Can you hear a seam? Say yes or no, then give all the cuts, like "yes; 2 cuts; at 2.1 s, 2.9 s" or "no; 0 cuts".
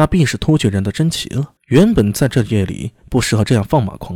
yes; 1 cut; at 1.6 s